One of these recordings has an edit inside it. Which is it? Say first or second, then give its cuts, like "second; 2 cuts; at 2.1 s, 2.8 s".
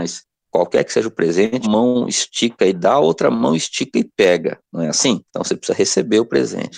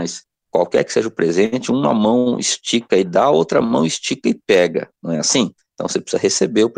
first; 2 cuts; at 1.6 s, 5.3 s